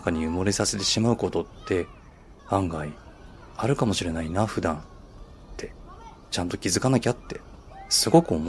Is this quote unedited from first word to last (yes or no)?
no